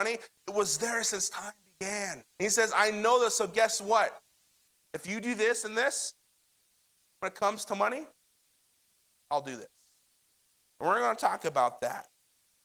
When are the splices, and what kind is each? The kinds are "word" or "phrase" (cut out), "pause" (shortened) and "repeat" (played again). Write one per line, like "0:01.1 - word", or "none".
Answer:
0:02.3 - pause